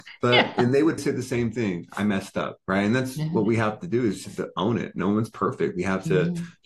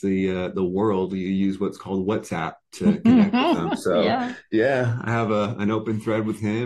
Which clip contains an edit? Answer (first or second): first